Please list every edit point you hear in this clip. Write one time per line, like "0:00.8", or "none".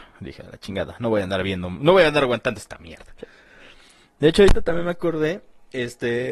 none